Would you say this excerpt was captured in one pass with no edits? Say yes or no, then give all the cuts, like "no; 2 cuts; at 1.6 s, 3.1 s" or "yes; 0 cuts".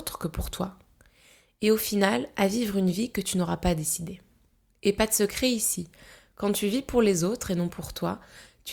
yes; 0 cuts